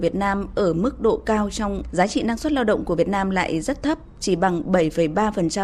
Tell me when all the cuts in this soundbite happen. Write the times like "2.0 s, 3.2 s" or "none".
1.9 s